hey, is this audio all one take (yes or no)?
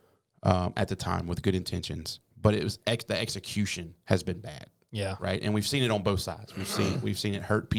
no